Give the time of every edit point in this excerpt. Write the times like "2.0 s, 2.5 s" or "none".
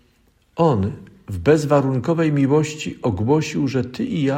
none

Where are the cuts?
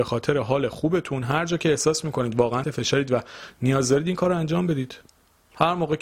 2.6 s

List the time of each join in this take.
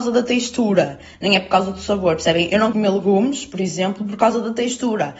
2.7 s

